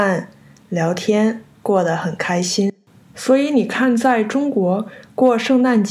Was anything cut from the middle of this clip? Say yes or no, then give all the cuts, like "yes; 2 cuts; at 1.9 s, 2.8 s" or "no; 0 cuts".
no; 0 cuts